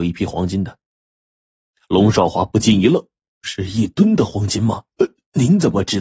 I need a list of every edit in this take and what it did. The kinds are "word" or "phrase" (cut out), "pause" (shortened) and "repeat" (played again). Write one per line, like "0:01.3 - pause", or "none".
0:04.9 - pause